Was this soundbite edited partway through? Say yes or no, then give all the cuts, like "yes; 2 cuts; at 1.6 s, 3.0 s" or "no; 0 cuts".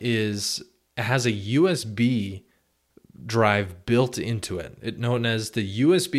no; 0 cuts